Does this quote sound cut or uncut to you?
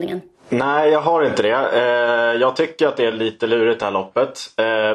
uncut